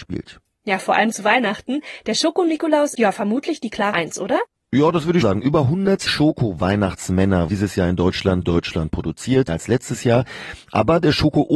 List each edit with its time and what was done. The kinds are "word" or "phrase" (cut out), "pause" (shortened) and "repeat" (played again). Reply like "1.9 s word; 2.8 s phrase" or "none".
2.9 s word; 3.9 s word; 5.2 s word; 6.1 s word; 7.5 s word; 8.4 s word; 9.5 s word